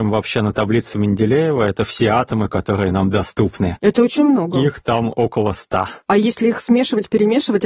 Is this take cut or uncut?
uncut